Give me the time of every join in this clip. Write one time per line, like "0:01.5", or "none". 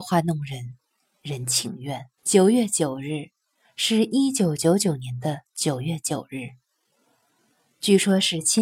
0:02.2